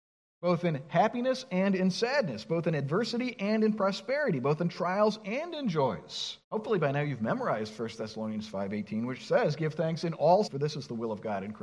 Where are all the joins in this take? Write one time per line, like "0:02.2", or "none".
0:06.4
0:10.5